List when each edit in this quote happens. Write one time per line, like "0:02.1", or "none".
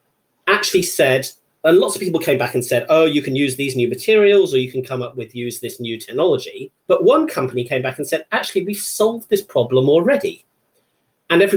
0:06.8